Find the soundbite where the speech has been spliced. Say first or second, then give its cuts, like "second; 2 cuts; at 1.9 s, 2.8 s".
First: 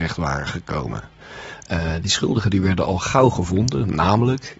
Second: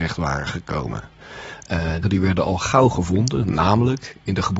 second; 1 cut; at 2.0 s